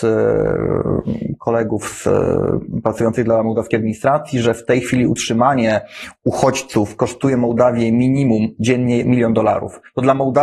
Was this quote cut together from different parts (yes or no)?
yes